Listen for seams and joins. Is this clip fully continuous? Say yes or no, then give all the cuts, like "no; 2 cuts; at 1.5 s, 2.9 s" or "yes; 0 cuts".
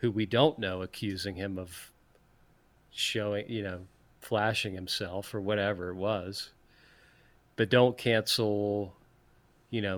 yes; 0 cuts